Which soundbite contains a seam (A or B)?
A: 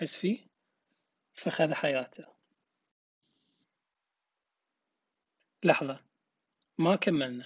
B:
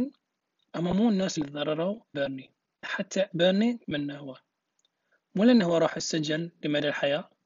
B